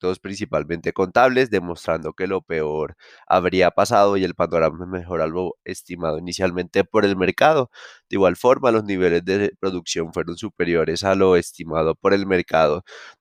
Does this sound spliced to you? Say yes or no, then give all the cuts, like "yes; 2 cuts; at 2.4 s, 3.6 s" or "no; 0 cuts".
no; 0 cuts